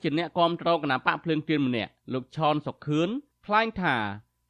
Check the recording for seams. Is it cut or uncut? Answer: cut